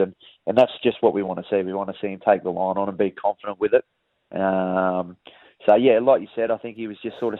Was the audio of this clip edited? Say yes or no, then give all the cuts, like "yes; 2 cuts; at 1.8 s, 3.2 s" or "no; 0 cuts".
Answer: no; 0 cuts